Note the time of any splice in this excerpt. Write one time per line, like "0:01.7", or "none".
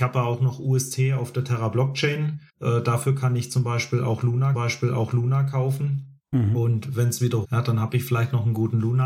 0:02.5
0:04.5
0:07.4